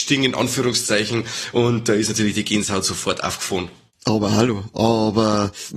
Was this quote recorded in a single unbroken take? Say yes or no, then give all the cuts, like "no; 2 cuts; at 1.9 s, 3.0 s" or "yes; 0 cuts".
yes; 0 cuts